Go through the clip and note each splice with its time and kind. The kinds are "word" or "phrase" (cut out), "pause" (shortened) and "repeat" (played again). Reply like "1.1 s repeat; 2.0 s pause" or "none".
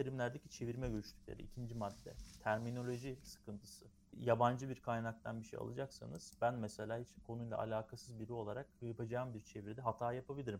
none

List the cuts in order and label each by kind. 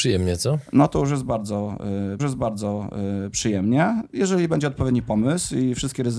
2.2 s repeat

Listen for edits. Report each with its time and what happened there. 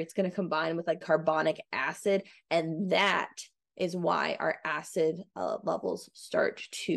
1.0 s phrase

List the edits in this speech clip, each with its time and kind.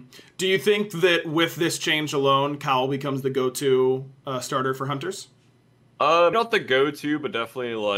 6.3 s word

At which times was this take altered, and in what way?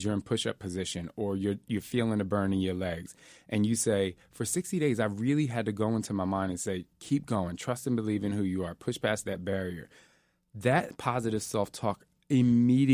6.9 s pause

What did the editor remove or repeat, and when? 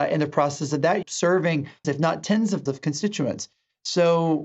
1.0 s word; 1.8 s word; 2.7 s word

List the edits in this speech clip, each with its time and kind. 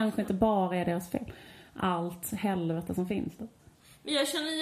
none

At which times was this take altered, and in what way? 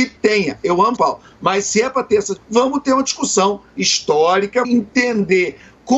1.0 s word; 2.4 s word; 4.6 s word

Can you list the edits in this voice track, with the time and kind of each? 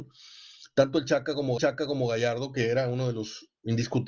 1.6 s repeat

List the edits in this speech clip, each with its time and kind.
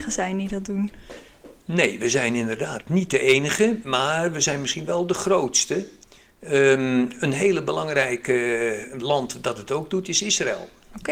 none

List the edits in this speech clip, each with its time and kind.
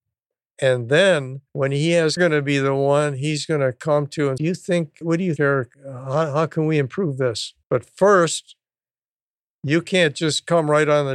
1.5 s pause; 2.2 s phrase; 4.4 s phrase; 5.0 s word; 5.4 s word; 5.7 s pause; 7.6 s pause

